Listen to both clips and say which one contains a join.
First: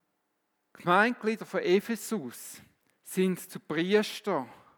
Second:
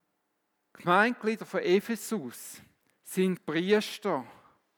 second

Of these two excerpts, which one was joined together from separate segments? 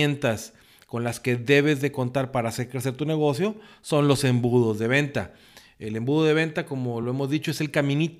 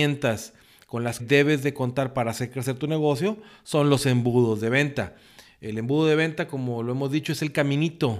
second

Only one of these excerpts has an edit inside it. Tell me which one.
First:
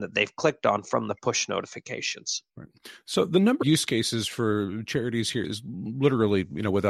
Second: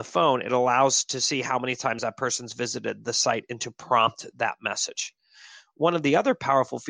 first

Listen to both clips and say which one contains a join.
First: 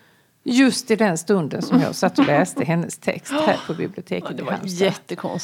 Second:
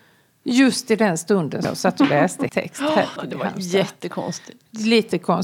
second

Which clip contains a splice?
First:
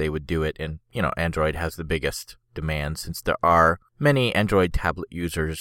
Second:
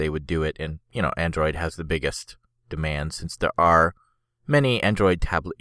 first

